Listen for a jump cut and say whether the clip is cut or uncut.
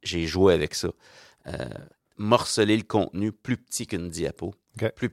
uncut